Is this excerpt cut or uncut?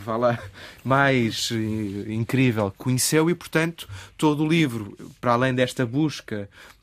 uncut